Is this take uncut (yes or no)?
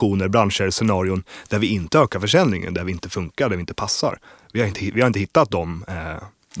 yes